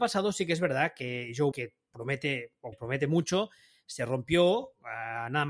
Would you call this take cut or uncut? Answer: cut